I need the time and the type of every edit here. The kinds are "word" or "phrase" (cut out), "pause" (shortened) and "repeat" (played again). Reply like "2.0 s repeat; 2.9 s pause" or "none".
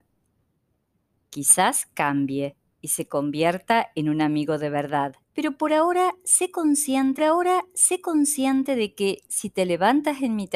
5.2 s pause; 7.2 s repeat

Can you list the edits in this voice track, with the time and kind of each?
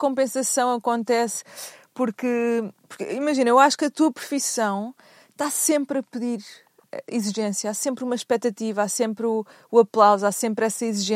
none

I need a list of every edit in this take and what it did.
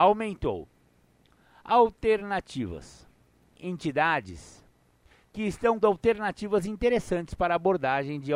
3.6 s word; 5.8 s word

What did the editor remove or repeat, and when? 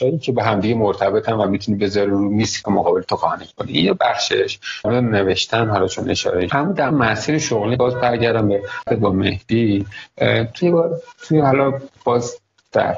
2.6 s word; 4.8 s phrase; 6.5 s word; 6.9 s word; 7.7 s word; 8.9 s word; 10.6 s word

